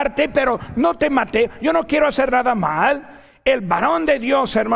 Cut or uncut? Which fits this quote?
uncut